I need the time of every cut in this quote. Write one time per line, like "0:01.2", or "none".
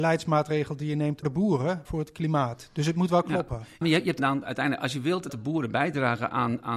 0:01.2
0:01.9
0:03.8
0:04.2
0:05.3